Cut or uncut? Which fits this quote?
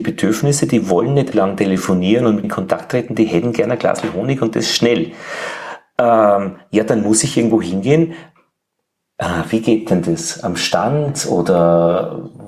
cut